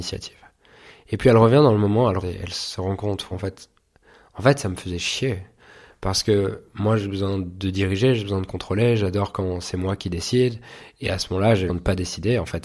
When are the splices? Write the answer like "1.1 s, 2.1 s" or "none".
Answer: 2.2 s, 3.3 s, 11.7 s